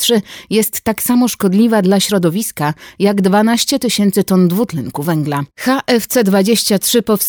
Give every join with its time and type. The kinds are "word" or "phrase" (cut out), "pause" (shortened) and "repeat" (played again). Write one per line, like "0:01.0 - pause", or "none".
0:05.5 - pause